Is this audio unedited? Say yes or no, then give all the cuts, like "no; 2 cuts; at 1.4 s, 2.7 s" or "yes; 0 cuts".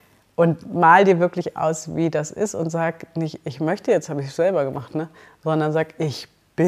yes; 0 cuts